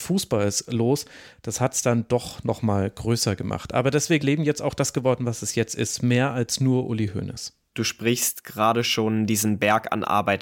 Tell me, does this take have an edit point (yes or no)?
yes